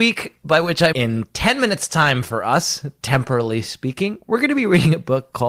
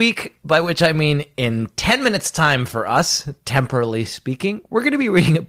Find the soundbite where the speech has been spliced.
first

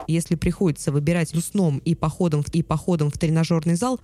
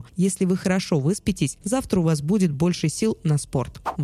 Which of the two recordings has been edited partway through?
first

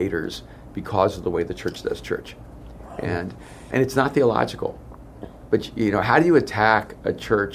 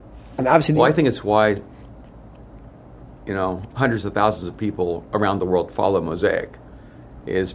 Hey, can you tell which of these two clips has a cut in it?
first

